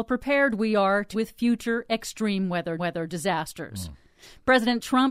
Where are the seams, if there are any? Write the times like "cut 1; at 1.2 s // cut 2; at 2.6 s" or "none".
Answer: cut 1; at 1.1 s // cut 2; at 2.8 s